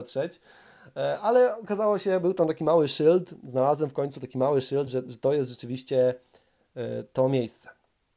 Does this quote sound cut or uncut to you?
uncut